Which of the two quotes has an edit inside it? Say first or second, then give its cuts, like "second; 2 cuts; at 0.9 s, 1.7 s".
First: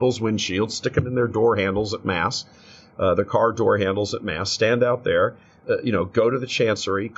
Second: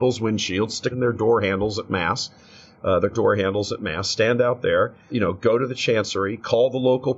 second; 3 cuts; at 0.9 s, 3.1 s, 5.1 s